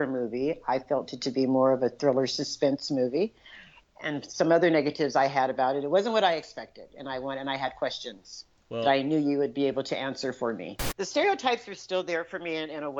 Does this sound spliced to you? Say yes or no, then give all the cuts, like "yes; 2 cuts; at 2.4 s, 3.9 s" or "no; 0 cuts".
no; 0 cuts